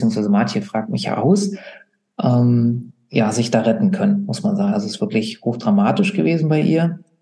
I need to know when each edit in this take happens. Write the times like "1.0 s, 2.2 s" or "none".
none